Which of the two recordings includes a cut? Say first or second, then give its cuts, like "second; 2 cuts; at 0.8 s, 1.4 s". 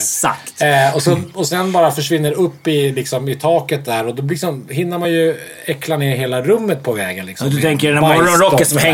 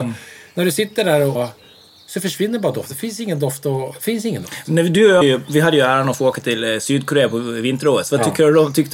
second; 2 cuts; at 1.3 s, 5.2 s